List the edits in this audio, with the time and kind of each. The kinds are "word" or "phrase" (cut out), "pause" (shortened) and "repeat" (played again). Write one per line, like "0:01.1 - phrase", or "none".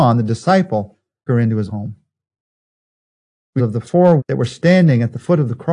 0:01.3 - word
0:01.7 - word
0:03.6 - phrase
0:04.2 - word